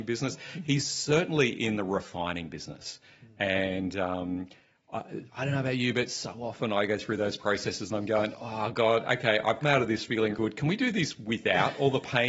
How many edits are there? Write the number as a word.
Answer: two